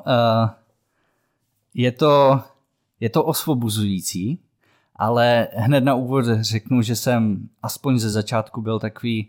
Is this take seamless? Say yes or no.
yes